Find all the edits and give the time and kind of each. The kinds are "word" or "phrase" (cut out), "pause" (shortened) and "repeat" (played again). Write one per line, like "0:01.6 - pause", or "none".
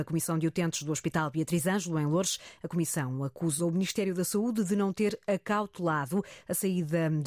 none